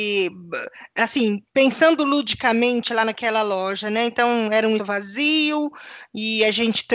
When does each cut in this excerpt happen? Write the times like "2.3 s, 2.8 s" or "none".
1.5 s, 4.8 s